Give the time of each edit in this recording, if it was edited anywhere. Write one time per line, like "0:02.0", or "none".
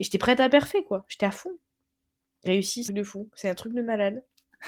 0:02.5
0:02.9